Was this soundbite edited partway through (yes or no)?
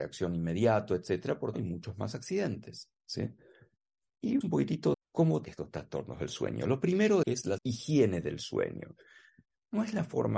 yes